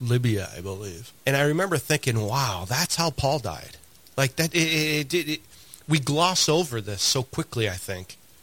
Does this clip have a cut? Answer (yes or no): yes